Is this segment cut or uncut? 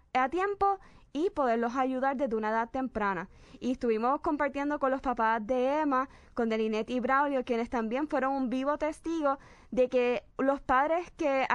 cut